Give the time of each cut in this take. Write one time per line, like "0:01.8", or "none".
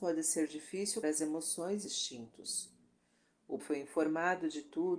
0:01.0
0:01.8
0:03.6